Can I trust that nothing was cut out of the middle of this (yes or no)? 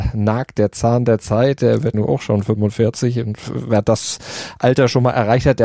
no